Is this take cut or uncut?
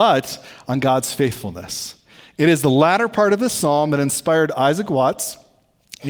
uncut